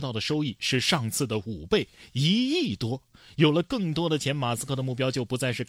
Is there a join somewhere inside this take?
no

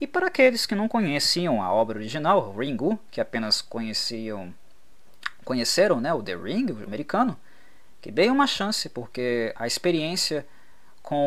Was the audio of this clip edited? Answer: yes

